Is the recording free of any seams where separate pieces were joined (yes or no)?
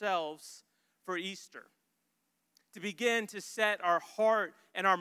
yes